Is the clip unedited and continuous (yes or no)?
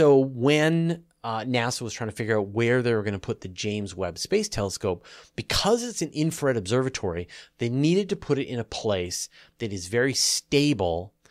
yes